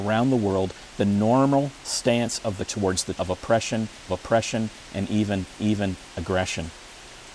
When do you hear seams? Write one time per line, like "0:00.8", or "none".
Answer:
0:02.7
0:03.2
0:04.1
0:05.6